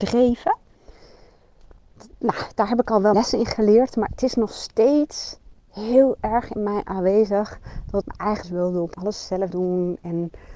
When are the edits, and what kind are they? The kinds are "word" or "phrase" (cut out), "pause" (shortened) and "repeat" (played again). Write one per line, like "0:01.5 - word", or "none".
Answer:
0:03.1 - word
0:05.6 - pause
0:08.0 - word
0:08.4 - word
0:08.9 - word
0:09.5 - word